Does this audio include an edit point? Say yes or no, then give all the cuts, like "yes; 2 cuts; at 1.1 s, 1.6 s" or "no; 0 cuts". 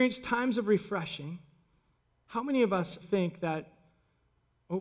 yes; 2 cuts; at 2.0 s, 3.0 s